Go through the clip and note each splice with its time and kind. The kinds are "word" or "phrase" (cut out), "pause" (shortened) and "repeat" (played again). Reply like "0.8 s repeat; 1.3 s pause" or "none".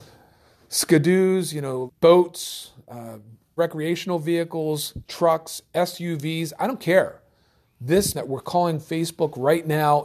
1.9 s word; 3.6 s word; 5.1 s word; 8.1 s word